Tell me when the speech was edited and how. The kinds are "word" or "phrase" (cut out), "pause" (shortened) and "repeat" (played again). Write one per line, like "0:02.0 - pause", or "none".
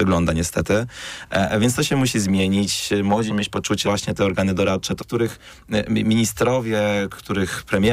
0:03.3 - word
0:03.8 - word
0:05.0 - phrase